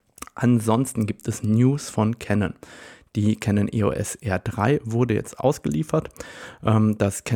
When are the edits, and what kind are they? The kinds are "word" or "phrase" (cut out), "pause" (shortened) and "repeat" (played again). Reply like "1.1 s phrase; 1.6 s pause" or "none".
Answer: none